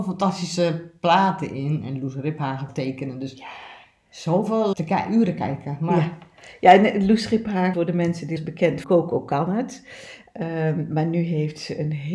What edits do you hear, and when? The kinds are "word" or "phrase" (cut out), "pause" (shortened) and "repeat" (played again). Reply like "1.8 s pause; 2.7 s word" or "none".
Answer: 2.7 s phrase; 4.7 s word; 7.7 s word; 8.4 s word; 8.8 s word